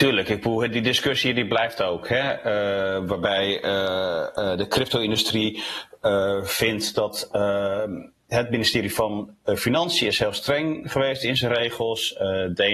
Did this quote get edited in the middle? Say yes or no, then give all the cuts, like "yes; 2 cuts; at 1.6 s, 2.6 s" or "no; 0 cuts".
no; 0 cuts